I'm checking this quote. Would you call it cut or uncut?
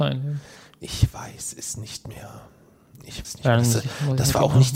cut